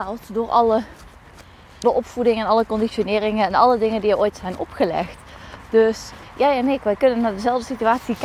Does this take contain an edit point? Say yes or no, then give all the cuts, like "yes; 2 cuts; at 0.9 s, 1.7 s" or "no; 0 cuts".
yes; 1 cut; at 1.8 s